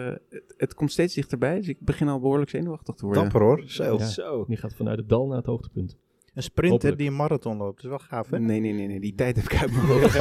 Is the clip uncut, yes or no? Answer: yes